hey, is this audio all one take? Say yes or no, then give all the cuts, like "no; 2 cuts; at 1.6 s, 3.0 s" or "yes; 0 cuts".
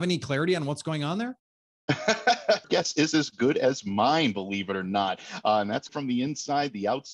no; 2 cuts; at 2.6 s, 5.9 s